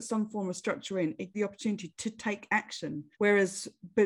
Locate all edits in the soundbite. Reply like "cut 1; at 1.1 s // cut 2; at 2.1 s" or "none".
cut 1; at 1.3 s // cut 2; at 3.1 s